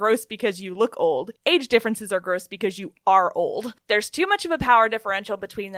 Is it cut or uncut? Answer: cut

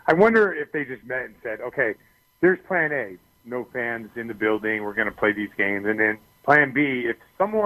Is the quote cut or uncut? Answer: uncut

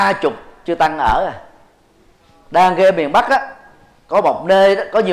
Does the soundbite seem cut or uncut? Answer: uncut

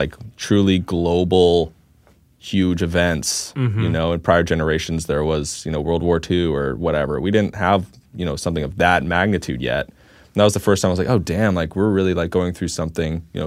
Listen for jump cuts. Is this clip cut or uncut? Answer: uncut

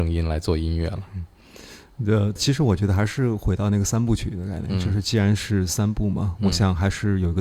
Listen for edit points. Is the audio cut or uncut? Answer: cut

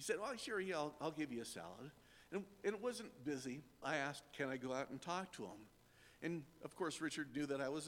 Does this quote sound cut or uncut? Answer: cut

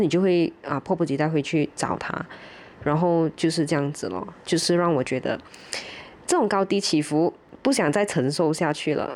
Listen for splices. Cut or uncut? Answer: uncut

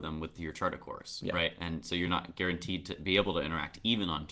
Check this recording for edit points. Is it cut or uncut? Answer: uncut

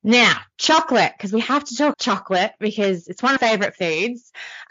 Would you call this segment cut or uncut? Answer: cut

